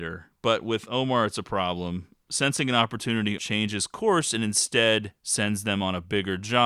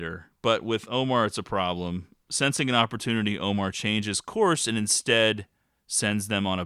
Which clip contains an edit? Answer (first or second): first